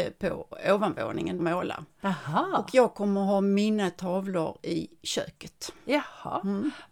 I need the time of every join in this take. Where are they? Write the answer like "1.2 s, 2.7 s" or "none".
1.4 s